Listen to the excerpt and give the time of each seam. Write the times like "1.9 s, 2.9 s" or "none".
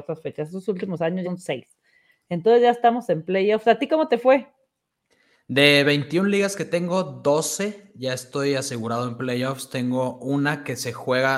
1.2 s